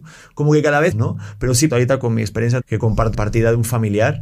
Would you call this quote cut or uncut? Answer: cut